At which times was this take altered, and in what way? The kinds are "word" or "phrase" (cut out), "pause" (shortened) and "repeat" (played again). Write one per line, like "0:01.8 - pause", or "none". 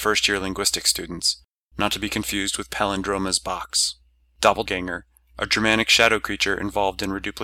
0:04.7 - word